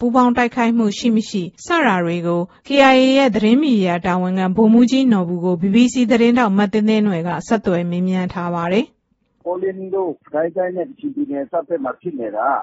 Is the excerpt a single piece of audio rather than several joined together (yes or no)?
no